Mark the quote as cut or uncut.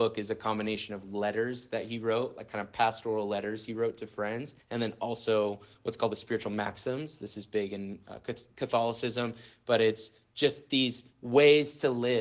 cut